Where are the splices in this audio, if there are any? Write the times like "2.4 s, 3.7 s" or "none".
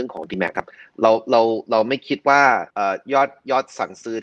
2.7 s